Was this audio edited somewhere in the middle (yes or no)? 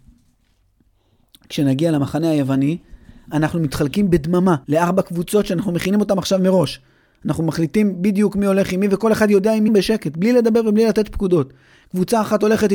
yes